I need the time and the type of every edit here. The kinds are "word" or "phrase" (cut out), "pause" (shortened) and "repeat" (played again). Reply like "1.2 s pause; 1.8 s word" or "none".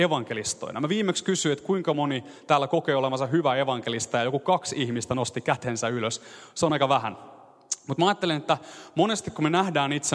none

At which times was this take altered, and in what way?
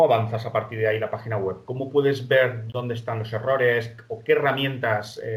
none

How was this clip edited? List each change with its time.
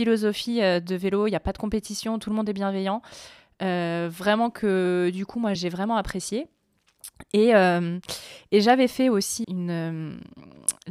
5.6 s word; 9.4 s word

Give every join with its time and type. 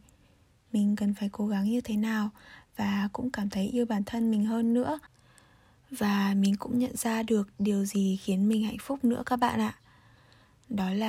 none

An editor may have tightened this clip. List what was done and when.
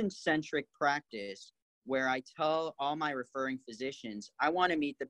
none

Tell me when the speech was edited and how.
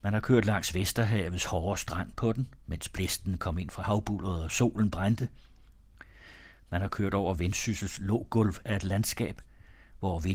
none

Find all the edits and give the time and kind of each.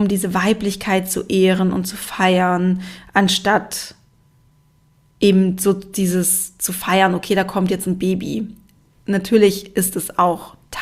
none

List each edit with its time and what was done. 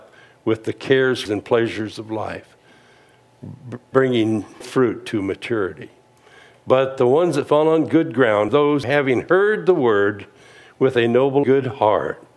1.3 s word; 3.9 s word; 4.6 s word; 8.5 s word; 8.8 s word; 11.4 s word

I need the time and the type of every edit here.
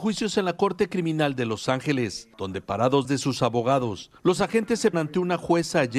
2.3 s pause; 3.0 s word; 4.2 s pause; 4.9 s word

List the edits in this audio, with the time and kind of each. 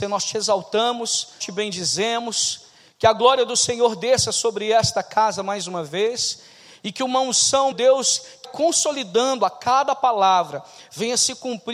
1.4 s word; 7.7 s word; 8.4 s word

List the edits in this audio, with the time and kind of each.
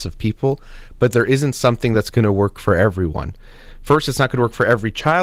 none

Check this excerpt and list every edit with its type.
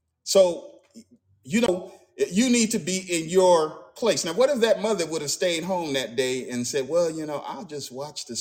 none

